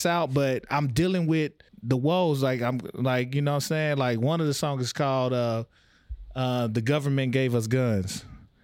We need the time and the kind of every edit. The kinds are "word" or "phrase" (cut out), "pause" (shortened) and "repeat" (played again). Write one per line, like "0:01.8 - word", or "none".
0:01.7 - pause